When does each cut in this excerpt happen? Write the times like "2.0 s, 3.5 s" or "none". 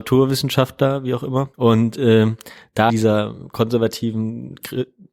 1.5 s, 2.9 s